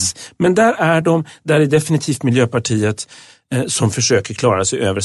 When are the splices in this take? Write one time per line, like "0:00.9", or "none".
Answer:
none

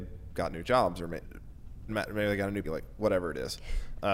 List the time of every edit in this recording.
0:01.2
0:01.9
0:02.6

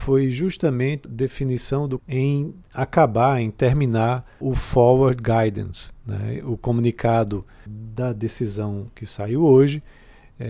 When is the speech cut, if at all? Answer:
0:01.0
0:02.0
0:04.4
0:07.7

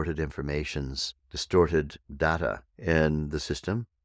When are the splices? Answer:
0:01.2
0:02.7

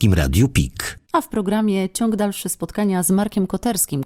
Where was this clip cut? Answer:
none

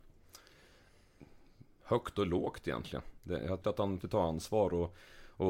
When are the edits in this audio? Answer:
0:03.6
0:04.0

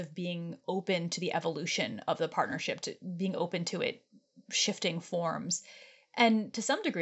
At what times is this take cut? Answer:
none

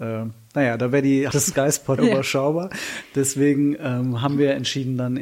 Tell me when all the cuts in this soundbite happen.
0:01.3
0:02.0

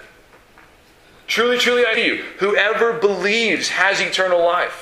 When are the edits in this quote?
0:01.9

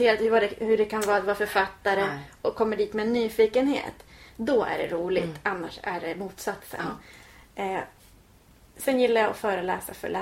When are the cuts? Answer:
none

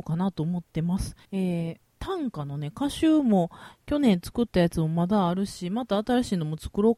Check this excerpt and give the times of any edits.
0:01.2
0:01.8

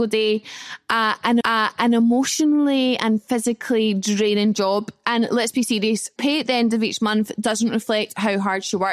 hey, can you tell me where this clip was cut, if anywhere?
0:01.4
0:06.2

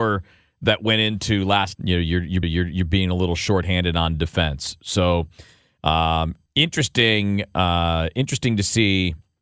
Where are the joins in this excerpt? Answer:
0:01.7
0:02.4
0:06.5

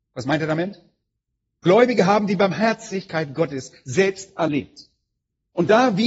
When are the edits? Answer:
none

